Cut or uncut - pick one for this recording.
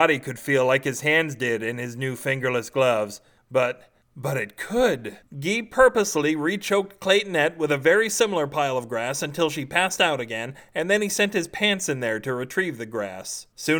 uncut